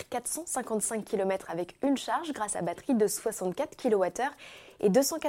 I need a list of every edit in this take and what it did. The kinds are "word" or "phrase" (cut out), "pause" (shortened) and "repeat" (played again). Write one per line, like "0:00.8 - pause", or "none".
0:02.5 - phrase